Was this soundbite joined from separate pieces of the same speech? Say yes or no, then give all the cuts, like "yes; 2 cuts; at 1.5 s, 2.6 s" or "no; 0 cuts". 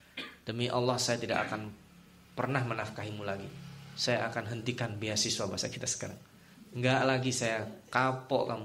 no; 0 cuts